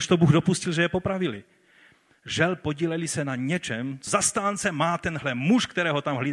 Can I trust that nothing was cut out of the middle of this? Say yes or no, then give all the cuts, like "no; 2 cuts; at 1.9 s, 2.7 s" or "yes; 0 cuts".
no; 1 cut; at 4.1 s